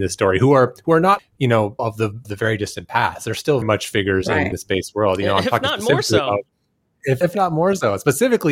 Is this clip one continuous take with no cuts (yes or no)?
no